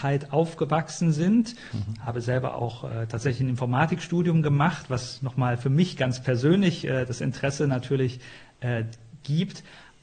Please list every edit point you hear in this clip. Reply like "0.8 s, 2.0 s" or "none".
none